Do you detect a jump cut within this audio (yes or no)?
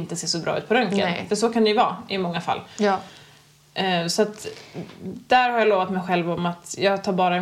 no